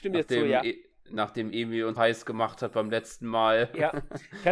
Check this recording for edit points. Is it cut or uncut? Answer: cut